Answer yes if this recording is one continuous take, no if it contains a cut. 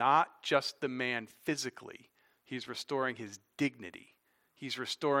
yes